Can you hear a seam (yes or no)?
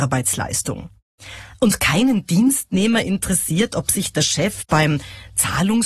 no